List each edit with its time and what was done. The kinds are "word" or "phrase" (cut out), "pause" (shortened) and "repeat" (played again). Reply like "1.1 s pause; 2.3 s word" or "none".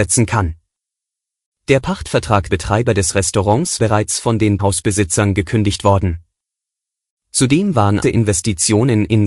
2.5 s word; 3.8 s word; 4.6 s word; 8.0 s phrase